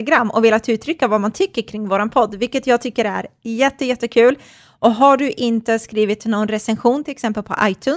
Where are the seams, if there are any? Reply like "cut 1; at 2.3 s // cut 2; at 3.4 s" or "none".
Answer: none